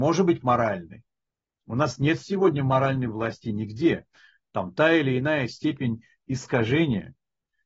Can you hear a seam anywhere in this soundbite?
no; 0 cuts

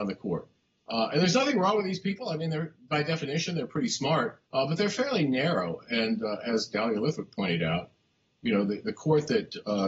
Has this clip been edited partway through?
yes; 1 cut; at 4.5 s

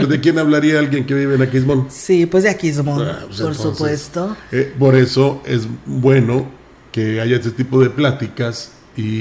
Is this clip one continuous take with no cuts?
yes; 0 cuts

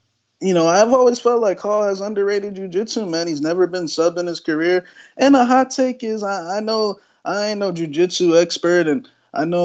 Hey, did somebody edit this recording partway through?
no; 0 cuts

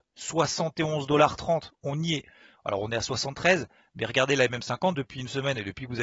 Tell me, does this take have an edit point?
no; 0 cuts

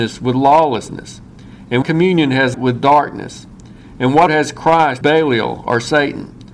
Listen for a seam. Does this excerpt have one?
yes; 4 cuts; at 1.8 s, 2.5 s, 4.3 s, 5.0 s

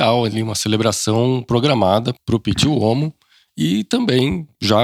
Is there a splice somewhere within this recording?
no; 0 cuts

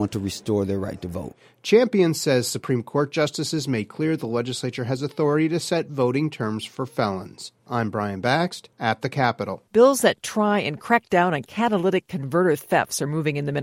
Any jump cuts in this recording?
yes; 3 cuts; at 7.6 s, 8.7 s, 9.7 s

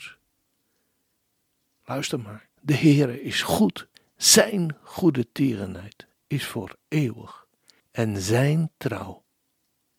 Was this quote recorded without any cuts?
no; 3 cuts; at 2.5 s, 3.9 s, 7.8 s

